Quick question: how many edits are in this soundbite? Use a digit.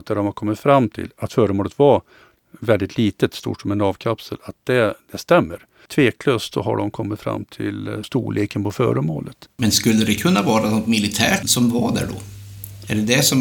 3